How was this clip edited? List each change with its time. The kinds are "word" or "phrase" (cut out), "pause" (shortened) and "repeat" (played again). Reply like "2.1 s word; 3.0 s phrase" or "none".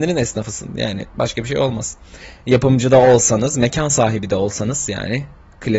1.1 s pause